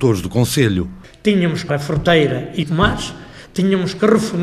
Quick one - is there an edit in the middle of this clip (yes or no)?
yes